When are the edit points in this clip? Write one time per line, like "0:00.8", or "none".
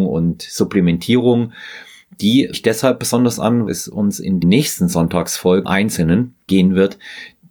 0:02.5
0:03.7
0:04.4
0:05.6
0:06.5